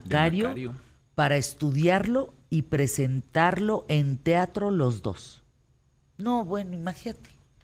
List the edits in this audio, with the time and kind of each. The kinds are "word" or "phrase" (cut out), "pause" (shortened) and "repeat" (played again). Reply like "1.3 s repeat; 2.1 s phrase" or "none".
none